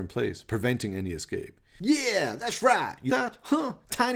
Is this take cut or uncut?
cut